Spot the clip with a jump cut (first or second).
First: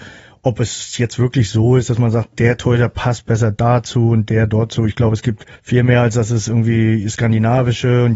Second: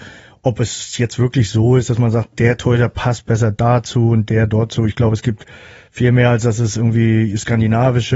first